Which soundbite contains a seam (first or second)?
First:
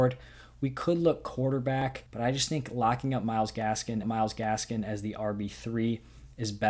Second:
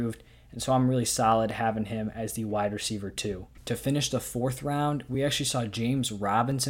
first